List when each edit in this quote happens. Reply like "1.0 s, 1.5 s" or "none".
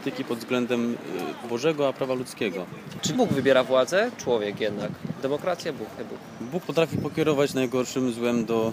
1.4 s, 3.1 s, 4.2 s, 6.0 s, 6.6 s, 7.5 s